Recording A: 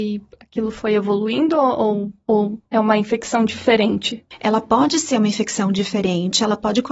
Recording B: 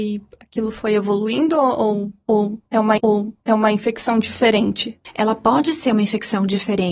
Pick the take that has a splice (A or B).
B